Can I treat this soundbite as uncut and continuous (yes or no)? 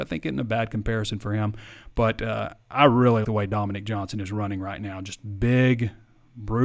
no